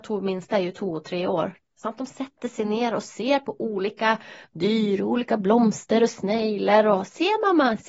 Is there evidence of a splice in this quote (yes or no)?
no